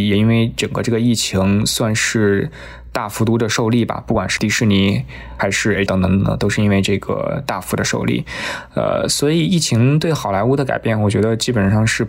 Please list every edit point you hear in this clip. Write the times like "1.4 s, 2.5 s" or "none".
4.4 s, 5.9 s